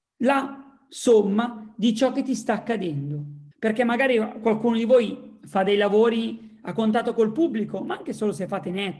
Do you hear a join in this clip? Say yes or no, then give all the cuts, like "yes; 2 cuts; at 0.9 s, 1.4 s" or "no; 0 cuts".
yes; 1 cut; at 3.5 s